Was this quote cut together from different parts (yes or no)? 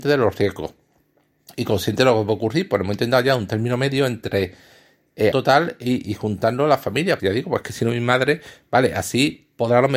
yes